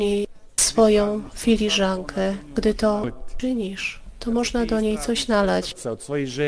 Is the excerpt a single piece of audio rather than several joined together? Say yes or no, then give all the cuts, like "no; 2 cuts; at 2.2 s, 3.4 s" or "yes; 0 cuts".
yes; 0 cuts